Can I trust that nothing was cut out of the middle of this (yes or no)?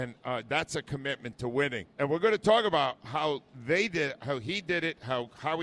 no